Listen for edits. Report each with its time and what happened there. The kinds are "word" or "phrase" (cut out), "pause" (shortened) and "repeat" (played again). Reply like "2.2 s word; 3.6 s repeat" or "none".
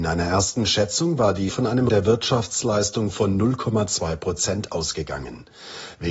1.5 s word; 1.9 s word